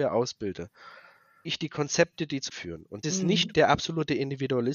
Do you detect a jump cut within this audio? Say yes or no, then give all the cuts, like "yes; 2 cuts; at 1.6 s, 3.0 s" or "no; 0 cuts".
yes; 4 cuts; at 1.4 s, 2.5 s, 3.0 s, 3.5 s